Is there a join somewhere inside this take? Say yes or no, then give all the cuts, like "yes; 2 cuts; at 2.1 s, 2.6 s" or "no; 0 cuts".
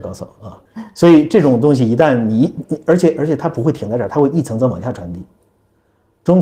no; 0 cuts